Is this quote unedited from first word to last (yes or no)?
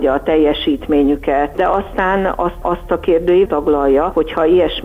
no